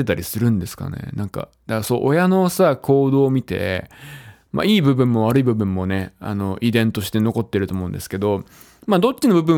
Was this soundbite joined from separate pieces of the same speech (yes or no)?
no